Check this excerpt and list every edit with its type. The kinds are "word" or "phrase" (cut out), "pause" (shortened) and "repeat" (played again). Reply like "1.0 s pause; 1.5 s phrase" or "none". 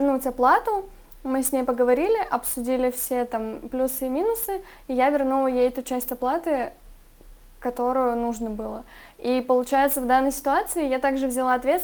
none